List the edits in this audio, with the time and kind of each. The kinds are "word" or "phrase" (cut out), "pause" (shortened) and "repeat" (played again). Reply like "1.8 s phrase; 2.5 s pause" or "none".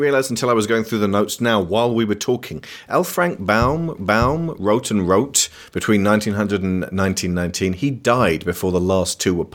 1.4 s word; 4.0 s repeat